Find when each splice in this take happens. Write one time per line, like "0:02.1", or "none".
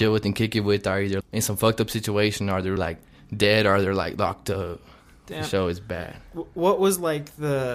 0:01.2
0:02.8